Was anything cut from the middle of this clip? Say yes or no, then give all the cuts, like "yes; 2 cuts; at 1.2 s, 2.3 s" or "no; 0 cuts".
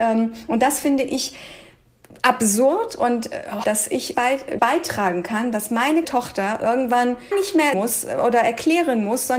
yes; 6 cuts; at 3.6 s, 4.1 s, 4.6 s, 6.0 s, 7.3 s, 7.7 s